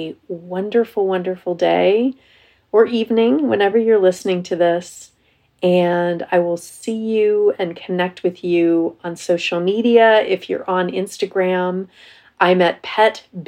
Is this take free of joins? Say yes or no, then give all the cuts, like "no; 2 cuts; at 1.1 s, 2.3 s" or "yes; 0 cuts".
yes; 0 cuts